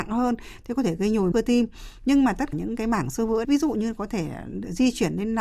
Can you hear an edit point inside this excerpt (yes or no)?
yes